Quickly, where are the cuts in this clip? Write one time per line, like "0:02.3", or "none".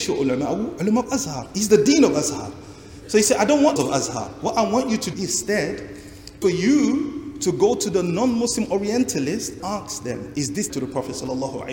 0:03.8
0:05.1
0:06.4
0:09.6
0:10.7